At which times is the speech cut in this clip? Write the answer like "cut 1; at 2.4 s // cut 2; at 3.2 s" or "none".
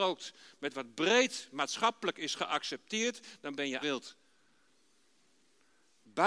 cut 1; at 3.8 s

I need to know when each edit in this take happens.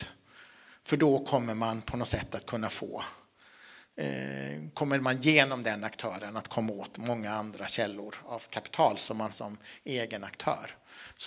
cut 1; at 9.3 s

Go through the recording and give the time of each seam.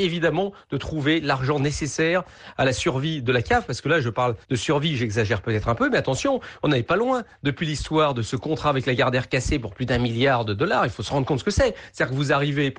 cut 1; at 4.4 s

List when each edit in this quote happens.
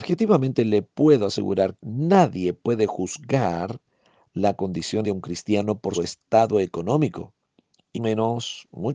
cut 1; at 1.8 s // cut 2; at 5.0 s // cut 3; at 5.9 s // cut 4; at 7.9 s

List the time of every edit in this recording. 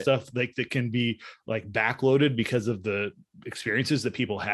none

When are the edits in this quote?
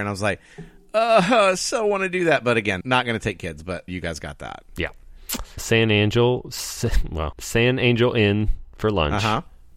cut 1; at 2.8 s // cut 2; at 3.9 s // cut 3; at 5.6 s // cut 4; at 7.3 s

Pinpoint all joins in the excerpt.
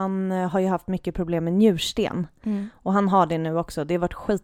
none

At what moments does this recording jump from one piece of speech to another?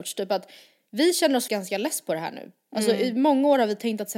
cut 1; at 1.5 s

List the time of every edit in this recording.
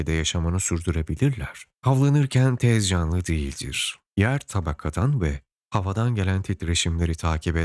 cut 1; at 1.7 s // cut 2; at 4.1 s

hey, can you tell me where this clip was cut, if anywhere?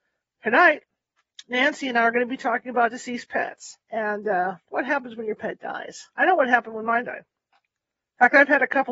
cut 1; at 3.8 s // cut 2; at 6.1 s

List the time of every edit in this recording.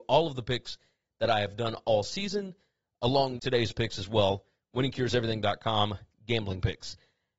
cut 1; at 3.4 s

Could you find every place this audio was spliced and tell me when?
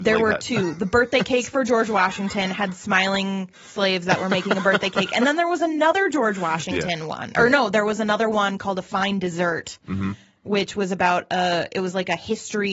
cut 1; at 3.5 s

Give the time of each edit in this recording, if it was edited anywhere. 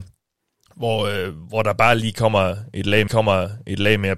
cut 1; at 3.1 s

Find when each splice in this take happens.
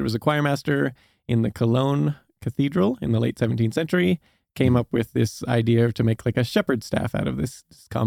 none

